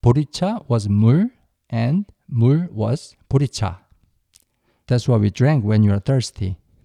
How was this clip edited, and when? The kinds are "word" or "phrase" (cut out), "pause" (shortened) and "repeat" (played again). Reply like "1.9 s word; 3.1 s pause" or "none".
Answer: none